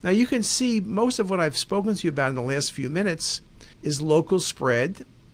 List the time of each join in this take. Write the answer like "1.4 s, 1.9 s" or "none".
3.7 s